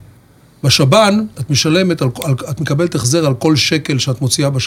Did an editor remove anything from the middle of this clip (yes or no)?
yes